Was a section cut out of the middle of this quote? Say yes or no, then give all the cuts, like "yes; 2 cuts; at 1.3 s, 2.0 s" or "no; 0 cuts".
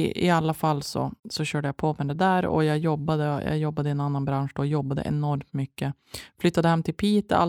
yes; 1 cut; at 1.2 s